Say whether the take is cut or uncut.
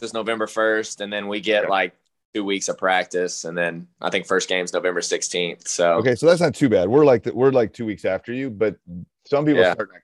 uncut